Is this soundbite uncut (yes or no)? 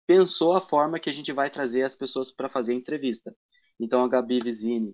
yes